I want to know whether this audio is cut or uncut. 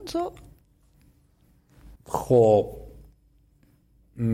cut